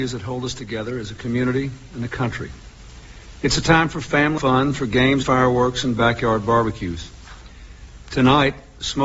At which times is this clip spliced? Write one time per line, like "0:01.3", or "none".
0:04.4
0:05.2